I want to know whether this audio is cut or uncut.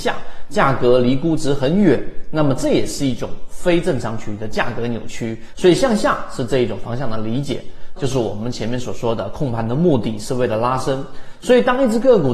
cut